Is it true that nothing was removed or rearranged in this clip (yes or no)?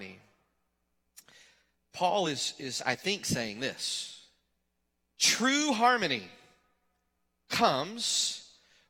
yes